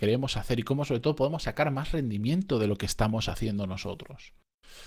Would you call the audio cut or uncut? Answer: uncut